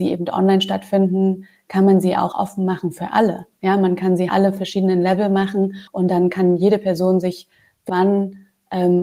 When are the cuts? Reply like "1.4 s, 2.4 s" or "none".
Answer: 2.3 s, 4.3 s, 5.9 s, 7.9 s